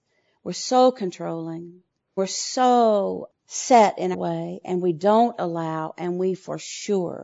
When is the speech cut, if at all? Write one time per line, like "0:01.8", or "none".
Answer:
0:02.2
0:03.4
0:04.1